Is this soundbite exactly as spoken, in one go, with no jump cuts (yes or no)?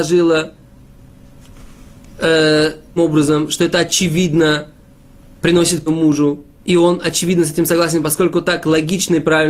no